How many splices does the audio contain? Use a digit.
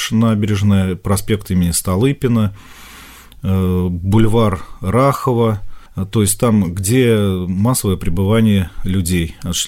0